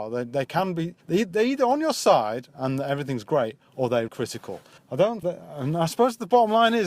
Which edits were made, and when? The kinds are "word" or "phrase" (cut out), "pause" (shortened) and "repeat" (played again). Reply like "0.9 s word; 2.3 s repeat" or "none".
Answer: 1.0 s pause; 4.1 s word; 4.8 s pause; 5.2 s word